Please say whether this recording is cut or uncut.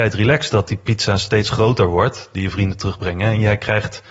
uncut